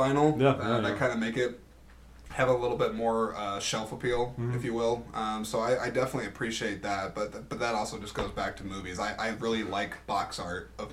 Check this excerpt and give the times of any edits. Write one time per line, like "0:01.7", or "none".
none

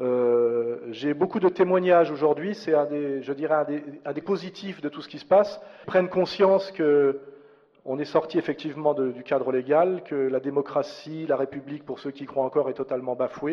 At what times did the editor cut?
0:04.2
0:05.8

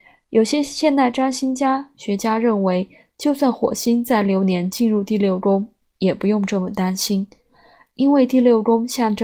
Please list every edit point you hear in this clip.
none

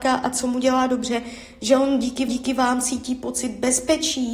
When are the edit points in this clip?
0:02.3

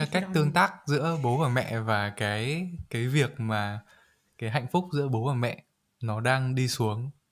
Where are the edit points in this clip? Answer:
none

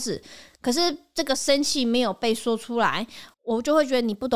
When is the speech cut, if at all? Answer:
0:03.3

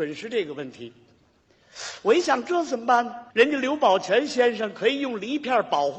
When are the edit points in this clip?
0:03.3

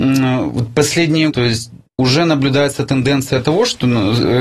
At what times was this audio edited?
0:01.3
0:01.9

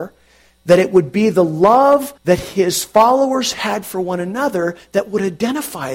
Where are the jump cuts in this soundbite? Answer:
0:02.2

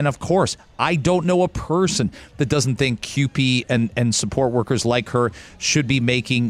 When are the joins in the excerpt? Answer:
none

